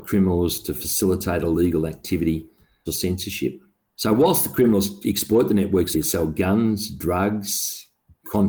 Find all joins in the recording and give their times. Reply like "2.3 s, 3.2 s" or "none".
2.9 s, 5.9 s